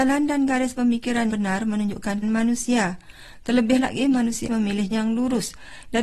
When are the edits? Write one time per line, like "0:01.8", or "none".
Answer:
0:01.3
0:02.2
0:04.5
0:04.9